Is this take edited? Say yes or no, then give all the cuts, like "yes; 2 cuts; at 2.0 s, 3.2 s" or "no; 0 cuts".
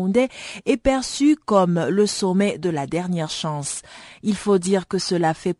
no; 0 cuts